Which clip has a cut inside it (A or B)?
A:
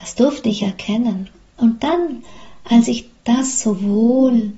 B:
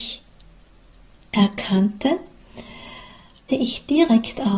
B